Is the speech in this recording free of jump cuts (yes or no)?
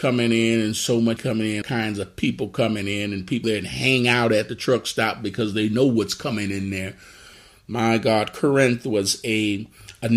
no